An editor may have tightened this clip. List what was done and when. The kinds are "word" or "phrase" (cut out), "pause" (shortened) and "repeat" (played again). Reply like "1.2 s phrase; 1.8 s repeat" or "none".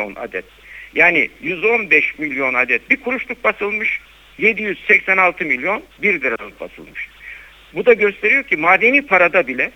none